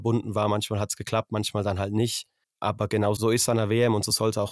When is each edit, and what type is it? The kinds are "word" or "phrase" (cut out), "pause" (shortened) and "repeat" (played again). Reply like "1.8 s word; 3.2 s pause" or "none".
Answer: 3.2 s word